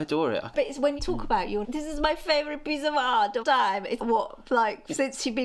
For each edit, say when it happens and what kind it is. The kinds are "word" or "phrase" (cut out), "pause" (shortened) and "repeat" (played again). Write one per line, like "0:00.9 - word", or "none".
0:01.0 - word
0:01.6 - word
0:03.4 - word
0:04.0 - word